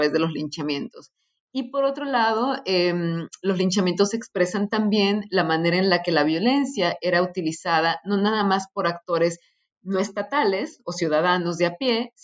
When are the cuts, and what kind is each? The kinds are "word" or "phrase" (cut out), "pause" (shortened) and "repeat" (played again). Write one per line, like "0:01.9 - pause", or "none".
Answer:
none